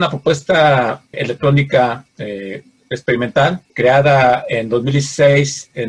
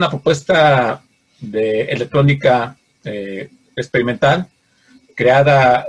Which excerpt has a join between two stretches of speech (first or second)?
first